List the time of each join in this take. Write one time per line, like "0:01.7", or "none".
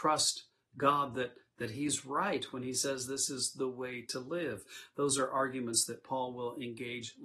none